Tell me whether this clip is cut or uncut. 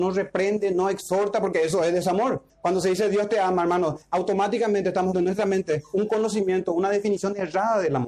cut